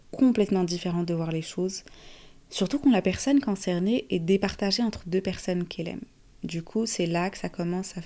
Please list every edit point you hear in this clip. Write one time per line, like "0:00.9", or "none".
none